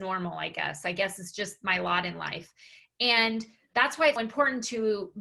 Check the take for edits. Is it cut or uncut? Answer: cut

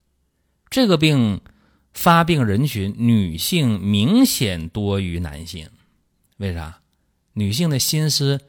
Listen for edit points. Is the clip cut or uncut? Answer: uncut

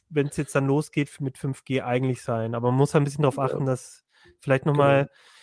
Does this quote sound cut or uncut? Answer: uncut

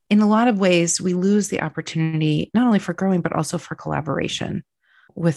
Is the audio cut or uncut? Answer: uncut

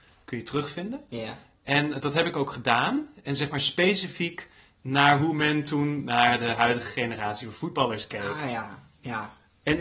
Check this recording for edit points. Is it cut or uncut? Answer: uncut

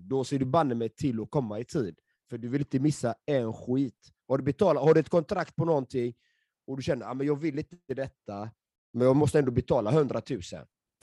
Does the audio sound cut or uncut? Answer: uncut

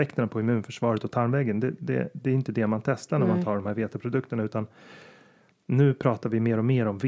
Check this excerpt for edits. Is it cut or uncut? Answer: uncut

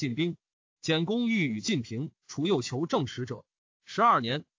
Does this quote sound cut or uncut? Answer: uncut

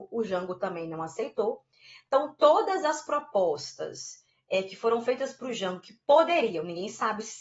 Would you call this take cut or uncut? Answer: uncut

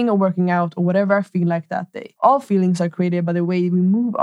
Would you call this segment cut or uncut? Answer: cut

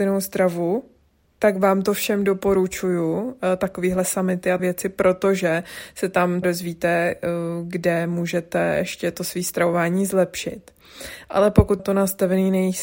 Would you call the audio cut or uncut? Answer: cut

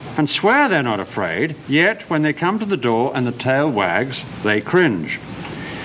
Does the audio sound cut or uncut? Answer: uncut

